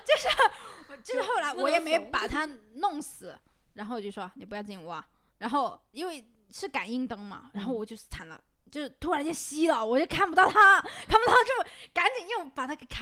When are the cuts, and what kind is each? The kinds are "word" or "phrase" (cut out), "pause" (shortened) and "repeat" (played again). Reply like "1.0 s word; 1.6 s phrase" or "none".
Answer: none